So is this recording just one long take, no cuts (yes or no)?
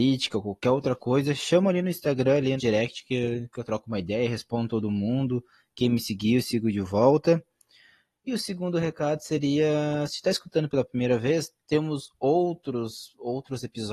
no